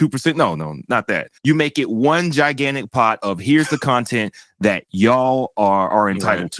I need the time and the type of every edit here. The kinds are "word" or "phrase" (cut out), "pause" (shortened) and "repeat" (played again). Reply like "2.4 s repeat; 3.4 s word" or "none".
1.4 s pause